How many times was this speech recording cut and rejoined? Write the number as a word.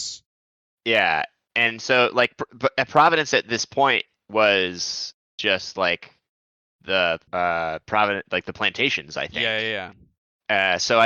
one